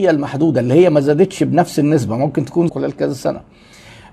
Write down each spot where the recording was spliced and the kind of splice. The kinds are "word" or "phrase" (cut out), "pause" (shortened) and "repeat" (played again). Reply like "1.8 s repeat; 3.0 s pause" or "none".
2.7 s phrase